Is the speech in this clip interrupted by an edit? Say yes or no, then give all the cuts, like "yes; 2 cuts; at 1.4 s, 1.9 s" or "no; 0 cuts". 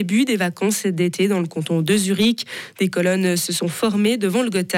no; 0 cuts